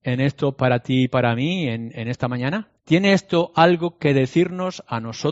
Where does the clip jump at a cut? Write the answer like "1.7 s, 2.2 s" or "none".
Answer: 2.8 s